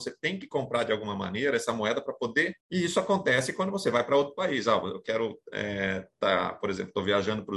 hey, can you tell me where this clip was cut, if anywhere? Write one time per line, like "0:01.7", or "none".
0:02.6
0:05.4